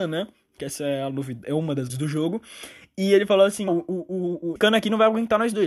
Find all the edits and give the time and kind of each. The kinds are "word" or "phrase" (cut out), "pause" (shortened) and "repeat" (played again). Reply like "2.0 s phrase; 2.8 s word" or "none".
1.9 s word; 3.7 s word; 4.6 s word